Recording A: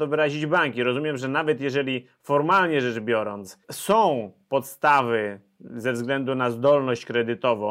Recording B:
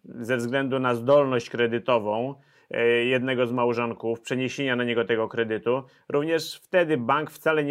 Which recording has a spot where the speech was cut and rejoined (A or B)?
A